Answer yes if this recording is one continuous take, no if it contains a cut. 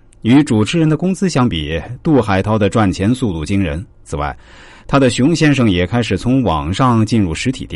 no